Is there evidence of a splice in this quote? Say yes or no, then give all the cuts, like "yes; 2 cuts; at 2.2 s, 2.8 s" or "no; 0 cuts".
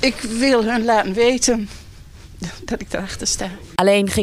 no; 0 cuts